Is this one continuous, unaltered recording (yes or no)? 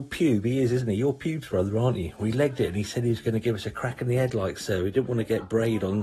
yes